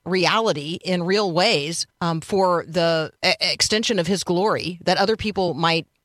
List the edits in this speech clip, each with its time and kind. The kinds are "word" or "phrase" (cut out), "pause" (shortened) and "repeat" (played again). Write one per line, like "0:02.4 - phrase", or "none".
0:01.9 - pause
0:03.2 - pause